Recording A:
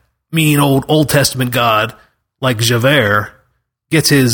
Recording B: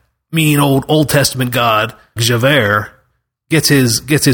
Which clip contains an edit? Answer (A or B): B